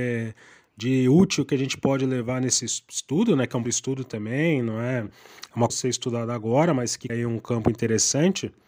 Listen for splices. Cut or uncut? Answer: cut